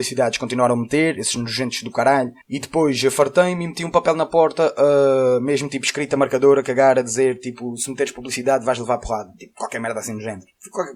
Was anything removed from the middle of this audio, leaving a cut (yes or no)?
yes